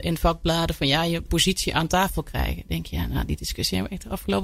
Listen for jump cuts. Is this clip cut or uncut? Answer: cut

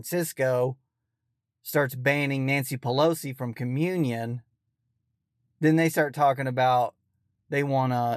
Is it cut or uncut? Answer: uncut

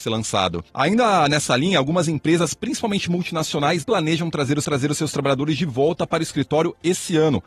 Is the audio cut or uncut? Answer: cut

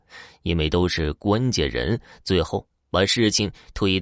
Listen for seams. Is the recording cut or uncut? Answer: uncut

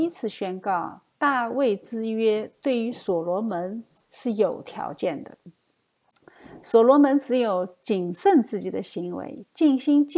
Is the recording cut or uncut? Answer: uncut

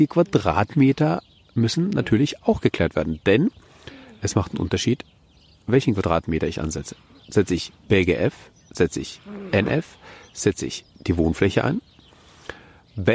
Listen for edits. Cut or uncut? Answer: uncut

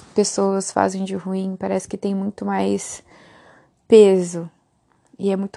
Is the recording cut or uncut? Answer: uncut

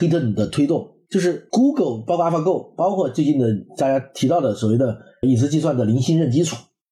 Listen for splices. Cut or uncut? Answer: uncut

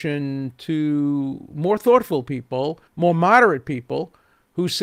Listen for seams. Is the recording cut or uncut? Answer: cut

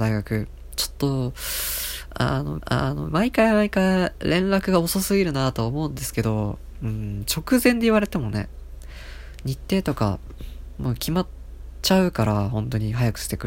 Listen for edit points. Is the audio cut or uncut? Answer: cut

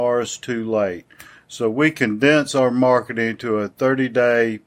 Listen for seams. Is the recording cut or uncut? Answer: uncut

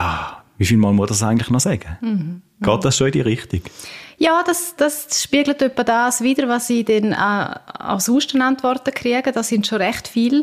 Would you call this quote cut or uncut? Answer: uncut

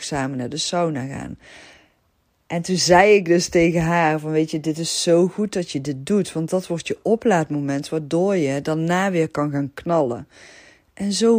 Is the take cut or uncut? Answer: uncut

